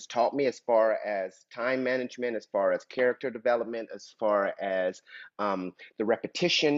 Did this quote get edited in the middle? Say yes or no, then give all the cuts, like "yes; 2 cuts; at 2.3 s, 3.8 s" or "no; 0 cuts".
no; 0 cuts